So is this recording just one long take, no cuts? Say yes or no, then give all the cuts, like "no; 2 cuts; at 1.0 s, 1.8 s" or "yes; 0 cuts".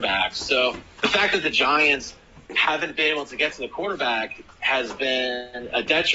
no; 1 cut; at 2.5 s